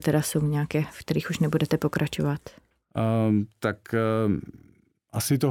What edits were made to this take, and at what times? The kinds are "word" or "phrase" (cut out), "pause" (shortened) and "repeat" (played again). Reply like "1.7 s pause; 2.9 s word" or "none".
none